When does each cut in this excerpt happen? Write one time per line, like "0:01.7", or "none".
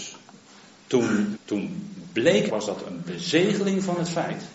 0:01.4
0:02.5